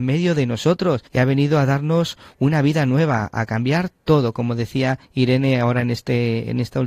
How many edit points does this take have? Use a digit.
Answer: 2